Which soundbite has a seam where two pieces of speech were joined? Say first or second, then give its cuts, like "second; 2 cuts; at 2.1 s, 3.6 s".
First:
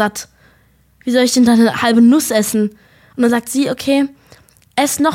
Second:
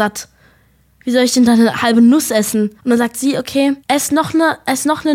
second; 2 cuts; at 2.8 s, 3.8 s